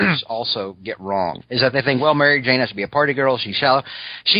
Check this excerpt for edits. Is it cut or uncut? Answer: uncut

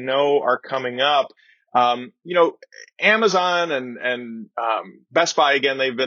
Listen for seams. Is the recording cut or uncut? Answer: uncut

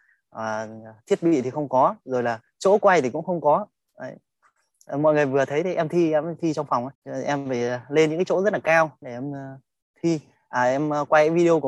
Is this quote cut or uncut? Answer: cut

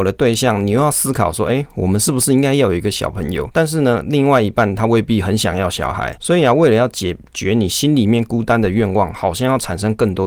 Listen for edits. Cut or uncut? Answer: uncut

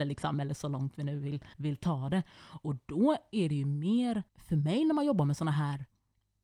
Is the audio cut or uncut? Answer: cut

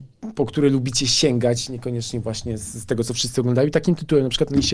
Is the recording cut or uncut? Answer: uncut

